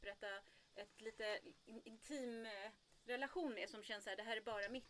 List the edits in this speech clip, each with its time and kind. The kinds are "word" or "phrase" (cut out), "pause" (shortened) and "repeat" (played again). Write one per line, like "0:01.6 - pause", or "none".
none